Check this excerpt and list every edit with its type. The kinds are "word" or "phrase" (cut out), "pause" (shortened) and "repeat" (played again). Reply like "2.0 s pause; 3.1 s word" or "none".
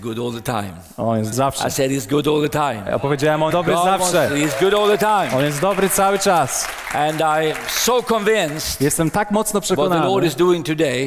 1.3 s word; 3.5 s word